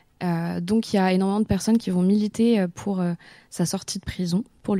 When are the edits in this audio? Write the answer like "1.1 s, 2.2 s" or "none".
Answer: none